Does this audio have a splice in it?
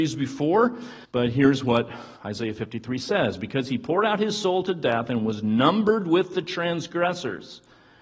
yes; 2 cuts; at 1.0 s, 2.2 s

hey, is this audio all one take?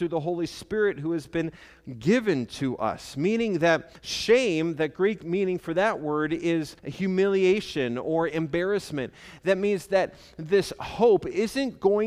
no; 2 cuts; at 4.0 s, 6.8 s

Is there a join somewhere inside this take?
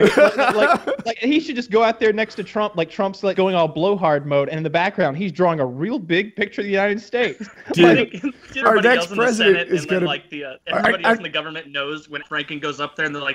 yes; 5 cuts; at 1.2 s, 3.3 s, 8.6 s, 10.6 s, 12.2 s

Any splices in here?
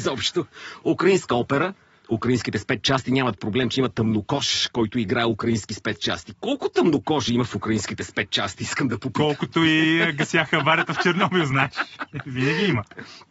yes; 1 cut; at 2.0 s

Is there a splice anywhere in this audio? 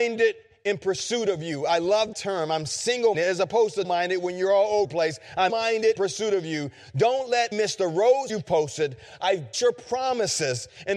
yes; 9 cuts; at 2.1 s, 3.1 s, 3.8 s, 4.8 s, 5.5 s, 6.0 s, 7.5 s, 8.3 s, 9.5 s

